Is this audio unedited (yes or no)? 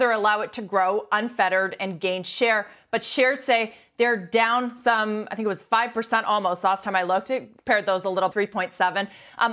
no